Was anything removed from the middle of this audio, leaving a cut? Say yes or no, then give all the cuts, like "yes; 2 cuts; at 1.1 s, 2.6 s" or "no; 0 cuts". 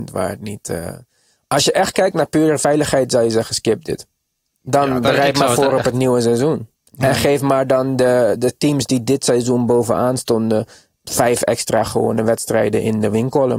yes; 2 cuts; at 4.4 s, 6.7 s